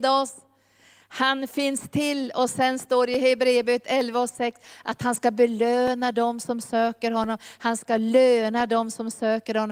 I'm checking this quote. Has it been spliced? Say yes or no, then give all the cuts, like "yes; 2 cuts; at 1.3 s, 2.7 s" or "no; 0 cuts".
no; 0 cuts